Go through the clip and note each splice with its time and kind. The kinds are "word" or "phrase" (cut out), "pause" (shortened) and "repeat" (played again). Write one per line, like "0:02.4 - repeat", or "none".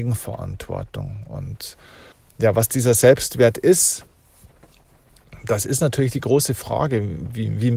0:02.1 - pause